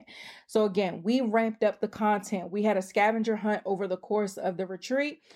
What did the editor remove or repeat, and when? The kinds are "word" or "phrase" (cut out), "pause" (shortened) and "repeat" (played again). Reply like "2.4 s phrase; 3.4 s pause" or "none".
none